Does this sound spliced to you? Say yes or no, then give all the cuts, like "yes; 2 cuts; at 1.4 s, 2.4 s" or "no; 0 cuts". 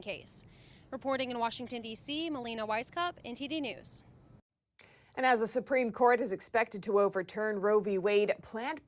no; 0 cuts